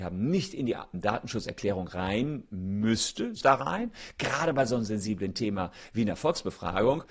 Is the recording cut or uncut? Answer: cut